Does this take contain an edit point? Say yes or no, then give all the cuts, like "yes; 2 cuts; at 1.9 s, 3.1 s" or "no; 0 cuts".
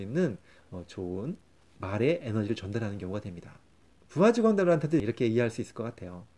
no; 0 cuts